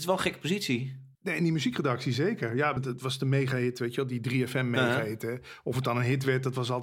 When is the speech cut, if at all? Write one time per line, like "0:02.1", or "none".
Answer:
0:01.1
0:02.8